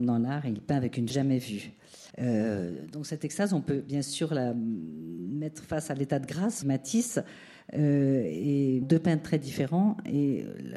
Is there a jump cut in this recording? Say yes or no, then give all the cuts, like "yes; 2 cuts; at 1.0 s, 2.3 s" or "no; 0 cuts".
yes; 4 cuts; at 1.1 s, 2.1 s, 6.6 s, 8.8 s